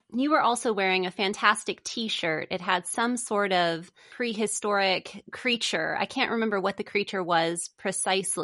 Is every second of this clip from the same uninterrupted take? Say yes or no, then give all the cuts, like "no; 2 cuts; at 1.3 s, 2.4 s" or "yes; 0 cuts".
yes; 0 cuts